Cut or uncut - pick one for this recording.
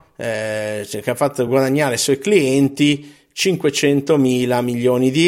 uncut